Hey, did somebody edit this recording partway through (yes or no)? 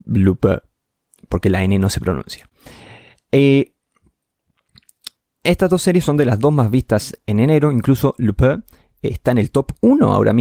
no